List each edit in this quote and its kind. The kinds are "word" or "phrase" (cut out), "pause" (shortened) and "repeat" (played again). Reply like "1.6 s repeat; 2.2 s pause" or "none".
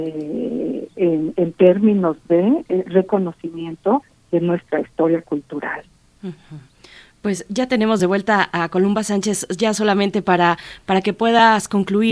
none